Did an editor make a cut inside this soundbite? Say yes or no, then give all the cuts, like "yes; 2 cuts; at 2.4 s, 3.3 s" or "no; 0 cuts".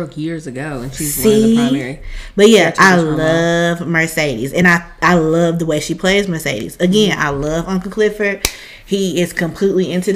no; 0 cuts